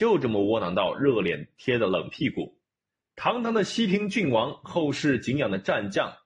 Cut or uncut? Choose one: cut